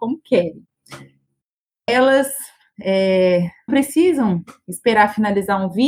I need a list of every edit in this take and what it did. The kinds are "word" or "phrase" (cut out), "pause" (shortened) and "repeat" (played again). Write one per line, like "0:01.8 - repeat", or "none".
0:03.7 - word